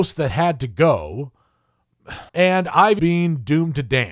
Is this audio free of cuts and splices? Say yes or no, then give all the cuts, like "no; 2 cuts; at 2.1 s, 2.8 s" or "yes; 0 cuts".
no; 2 cuts; at 2.3 s, 3.0 s